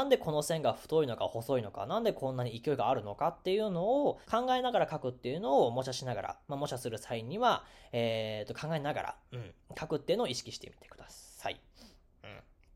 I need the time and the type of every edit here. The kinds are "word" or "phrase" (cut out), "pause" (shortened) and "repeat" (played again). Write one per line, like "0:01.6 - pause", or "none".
0:04.2 - pause